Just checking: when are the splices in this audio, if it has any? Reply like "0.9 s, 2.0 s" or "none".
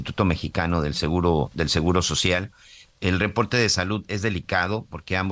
none